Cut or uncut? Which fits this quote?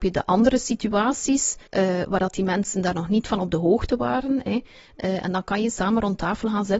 cut